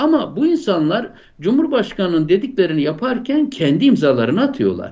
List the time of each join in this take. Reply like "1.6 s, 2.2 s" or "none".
none